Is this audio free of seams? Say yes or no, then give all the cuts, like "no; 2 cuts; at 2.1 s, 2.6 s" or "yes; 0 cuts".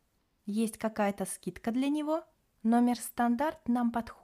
no; 1 cut; at 2.3 s